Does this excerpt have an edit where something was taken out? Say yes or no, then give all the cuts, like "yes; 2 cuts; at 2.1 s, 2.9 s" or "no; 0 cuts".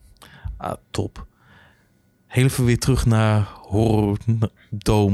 no; 0 cuts